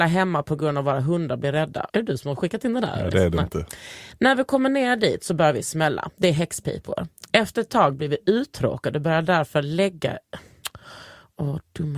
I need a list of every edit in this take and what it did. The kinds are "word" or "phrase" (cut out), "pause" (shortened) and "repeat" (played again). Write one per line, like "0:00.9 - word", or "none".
0:01.9 - pause